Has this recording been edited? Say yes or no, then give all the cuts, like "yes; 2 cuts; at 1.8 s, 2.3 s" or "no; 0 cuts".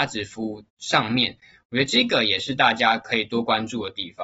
no; 0 cuts